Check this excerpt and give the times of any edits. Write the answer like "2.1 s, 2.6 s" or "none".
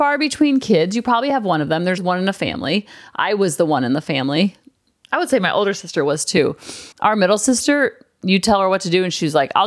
2.0 s, 6.9 s